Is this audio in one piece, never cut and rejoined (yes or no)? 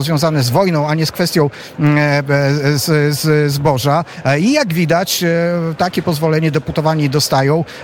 yes